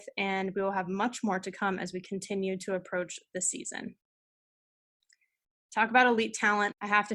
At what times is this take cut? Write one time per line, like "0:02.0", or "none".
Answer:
none